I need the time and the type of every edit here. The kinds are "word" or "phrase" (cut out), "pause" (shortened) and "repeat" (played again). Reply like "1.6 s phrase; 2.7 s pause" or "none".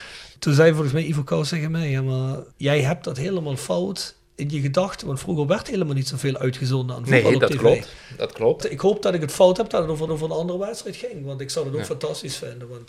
2.5 s pause; 10.1 s repeat